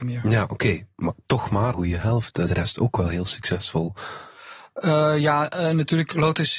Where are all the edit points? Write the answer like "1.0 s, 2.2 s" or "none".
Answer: 1.7 s, 2.5 s